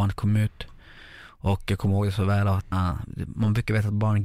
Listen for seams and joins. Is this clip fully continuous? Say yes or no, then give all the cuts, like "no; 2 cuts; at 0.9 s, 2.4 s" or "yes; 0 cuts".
no; 1 cut; at 2.7 s